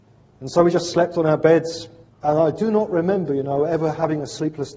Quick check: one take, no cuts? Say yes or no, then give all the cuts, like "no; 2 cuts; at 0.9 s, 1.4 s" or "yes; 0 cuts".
no; 1 cut; at 2.1 s